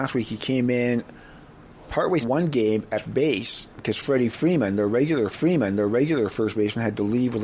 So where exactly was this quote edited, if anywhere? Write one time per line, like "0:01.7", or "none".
0:02.2
0:03.0
0:05.3